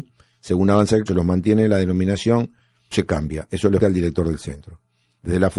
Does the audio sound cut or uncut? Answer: cut